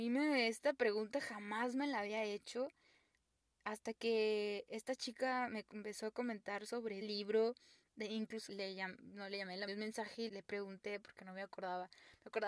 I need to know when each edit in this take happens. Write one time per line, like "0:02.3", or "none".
0:07.0
0:08.5
0:09.7
0:10.3